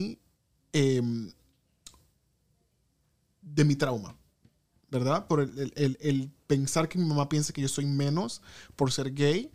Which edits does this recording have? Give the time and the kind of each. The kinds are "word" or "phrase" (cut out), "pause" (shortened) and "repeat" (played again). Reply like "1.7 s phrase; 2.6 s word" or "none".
none

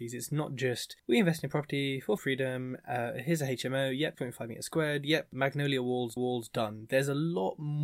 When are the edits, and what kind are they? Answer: 1.0 s pause; 2.2 s word; 4.1 s word; 5.3 s word; 6.2 s repeat

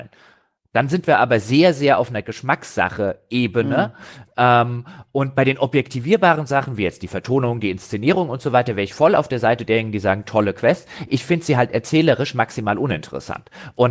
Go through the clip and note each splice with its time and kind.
none

